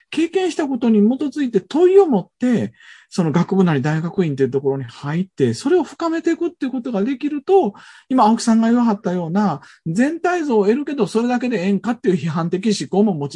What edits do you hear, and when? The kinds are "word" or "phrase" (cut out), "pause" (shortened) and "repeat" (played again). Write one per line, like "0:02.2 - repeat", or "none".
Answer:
none